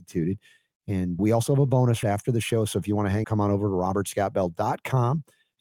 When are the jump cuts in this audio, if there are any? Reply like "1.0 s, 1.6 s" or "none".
1.2 s, 2.0 s, 3.2 s